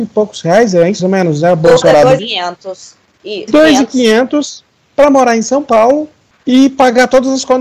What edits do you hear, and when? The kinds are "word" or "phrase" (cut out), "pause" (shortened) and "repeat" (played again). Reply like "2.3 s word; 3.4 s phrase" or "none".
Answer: 1.0 s word; 1.8 s word; 2.2 s word; 3.5 s word